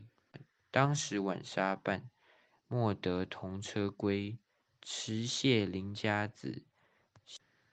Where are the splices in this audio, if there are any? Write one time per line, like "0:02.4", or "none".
none